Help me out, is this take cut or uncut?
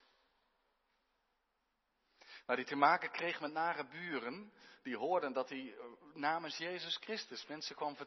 uncut